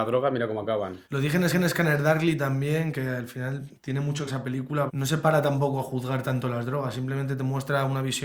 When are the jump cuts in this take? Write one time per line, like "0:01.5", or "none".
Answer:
0:01.0
0:01.5
0:03.7
0:04.3
0:04.9